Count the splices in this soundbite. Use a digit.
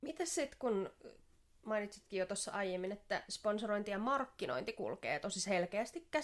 0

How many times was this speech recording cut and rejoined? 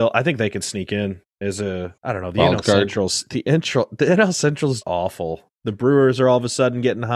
3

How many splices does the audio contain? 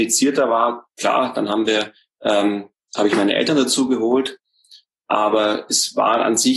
0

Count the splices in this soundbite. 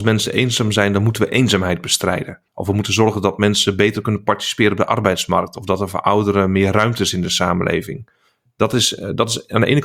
1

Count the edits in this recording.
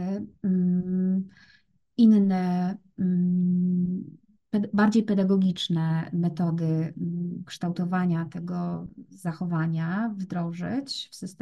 0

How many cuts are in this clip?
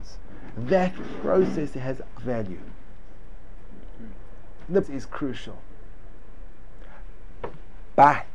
2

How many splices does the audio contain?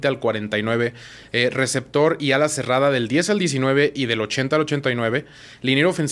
0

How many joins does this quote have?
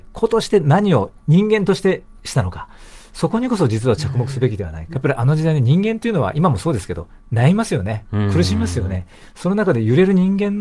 1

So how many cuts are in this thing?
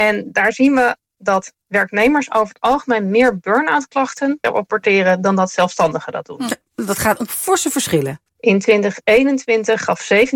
2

